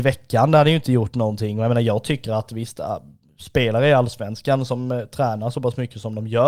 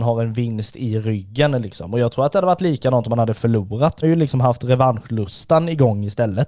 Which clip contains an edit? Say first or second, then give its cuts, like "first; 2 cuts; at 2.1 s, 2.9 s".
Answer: second; 1 cut; at 4.0 s